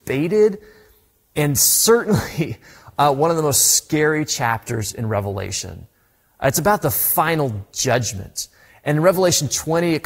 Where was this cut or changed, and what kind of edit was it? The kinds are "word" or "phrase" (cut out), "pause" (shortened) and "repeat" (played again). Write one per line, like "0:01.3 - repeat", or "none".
none